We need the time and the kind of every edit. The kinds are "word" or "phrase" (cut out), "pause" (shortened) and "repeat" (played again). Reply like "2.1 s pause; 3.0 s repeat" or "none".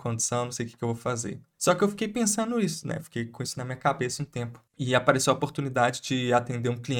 4.7 s pause